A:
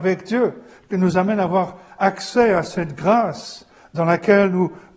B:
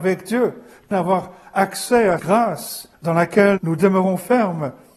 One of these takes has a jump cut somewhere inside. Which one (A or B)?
B